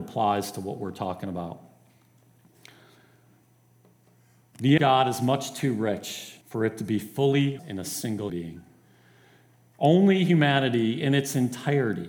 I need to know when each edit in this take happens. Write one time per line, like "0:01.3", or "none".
0:04.8
0:06.4
0:07.6
0:08.3